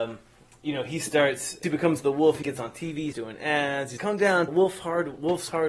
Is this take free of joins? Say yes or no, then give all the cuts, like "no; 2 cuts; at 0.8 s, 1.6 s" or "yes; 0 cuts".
no; 5 cuts; at 1.6 s, 2.4 s, 3.1 s, 4.0 s, 4.5 s